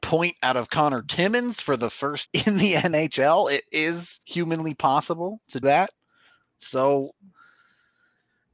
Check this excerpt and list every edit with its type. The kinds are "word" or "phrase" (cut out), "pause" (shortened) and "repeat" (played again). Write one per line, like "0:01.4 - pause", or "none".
0:02.3 - word
0:04.2 - pause
0:05.6 - word